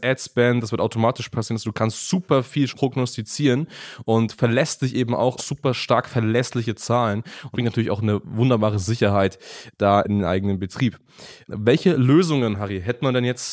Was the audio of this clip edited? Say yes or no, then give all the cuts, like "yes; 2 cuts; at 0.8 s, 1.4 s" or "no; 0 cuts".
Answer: yes; 3 cuts; at 2.7 s, 5.4 s, 7.5 s